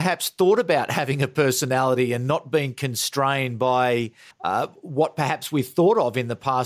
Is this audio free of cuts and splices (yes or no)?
no